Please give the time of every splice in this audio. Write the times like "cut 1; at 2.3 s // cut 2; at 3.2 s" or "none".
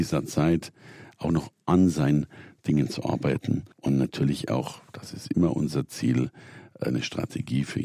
cut 1; at 3.7 s